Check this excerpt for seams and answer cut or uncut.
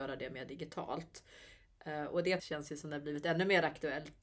cut